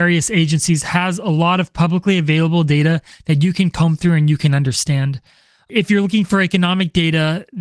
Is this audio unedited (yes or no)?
yes